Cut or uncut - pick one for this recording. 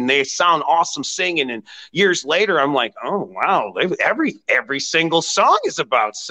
uncut